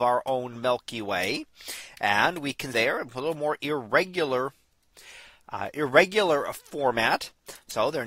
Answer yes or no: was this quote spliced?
yes